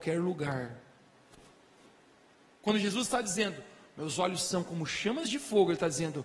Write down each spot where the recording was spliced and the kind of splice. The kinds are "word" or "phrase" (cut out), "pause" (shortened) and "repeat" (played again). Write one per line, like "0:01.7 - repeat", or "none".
none